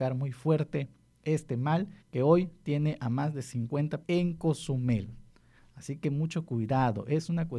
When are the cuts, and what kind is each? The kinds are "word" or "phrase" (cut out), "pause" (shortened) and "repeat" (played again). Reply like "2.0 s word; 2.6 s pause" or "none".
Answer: 2.0 s pause; 4.0 s phrase